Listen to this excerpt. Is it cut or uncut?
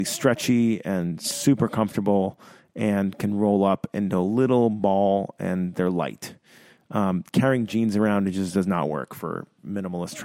uncut